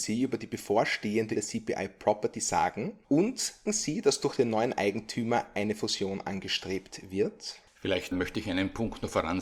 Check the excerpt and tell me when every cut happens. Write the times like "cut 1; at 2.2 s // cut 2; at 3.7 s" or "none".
cut 1; at 1.4 s // cut 2; at 3.7 s // cut 3; at 8.1 s